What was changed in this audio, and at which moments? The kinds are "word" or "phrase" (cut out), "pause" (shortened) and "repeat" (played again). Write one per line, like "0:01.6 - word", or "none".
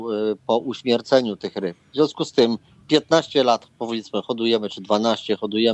none